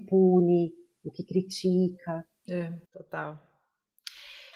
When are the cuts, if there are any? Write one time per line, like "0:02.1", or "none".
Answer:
0:02.9

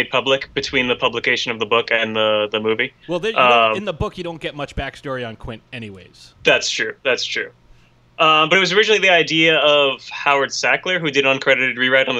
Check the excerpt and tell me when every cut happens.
0:03.0
0:06.3

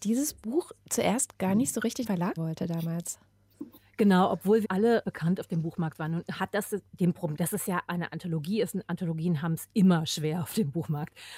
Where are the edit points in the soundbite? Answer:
0:02.1
0:02.4
0:03.8
0:04.6
0:05.0
0:07.3
0:07.9

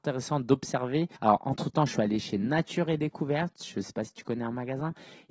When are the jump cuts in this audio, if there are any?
0:01.1

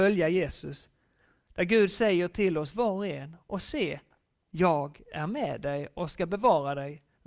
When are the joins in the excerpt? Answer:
none

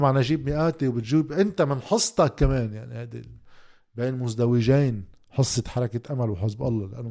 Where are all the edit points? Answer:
none

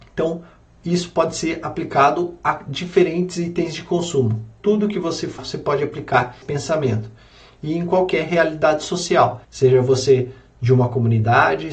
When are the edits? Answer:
0:05.4
0:06.4
0:09.4

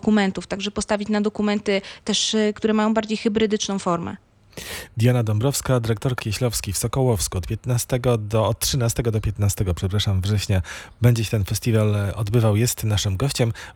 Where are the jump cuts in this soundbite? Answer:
0:06.2

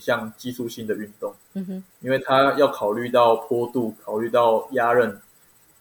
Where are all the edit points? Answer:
0:01.4
0:01.9

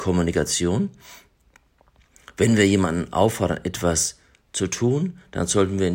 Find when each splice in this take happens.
none

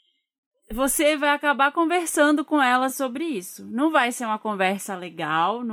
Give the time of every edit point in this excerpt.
none

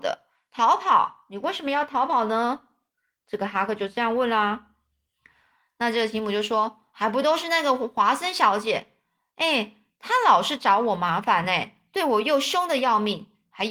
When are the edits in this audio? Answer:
none

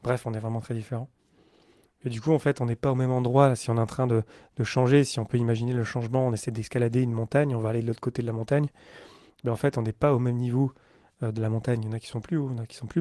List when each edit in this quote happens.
none

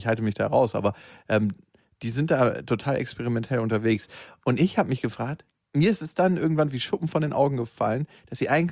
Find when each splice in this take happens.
none

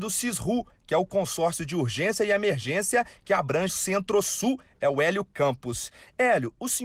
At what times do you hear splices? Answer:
0:03.7

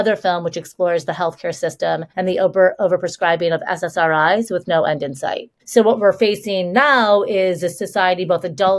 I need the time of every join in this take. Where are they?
0:02.1
0:05.6

